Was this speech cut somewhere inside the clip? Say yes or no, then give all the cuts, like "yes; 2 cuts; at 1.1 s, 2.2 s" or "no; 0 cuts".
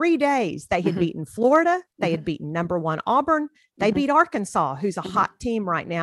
no; 0 cuts